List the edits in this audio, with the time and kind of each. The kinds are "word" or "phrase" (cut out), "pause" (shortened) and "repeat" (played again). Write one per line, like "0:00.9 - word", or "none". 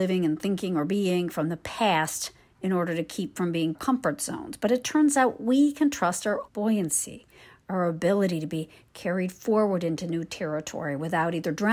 0:02.4 - pause
0:03.7 - phrase
0:06.5 - word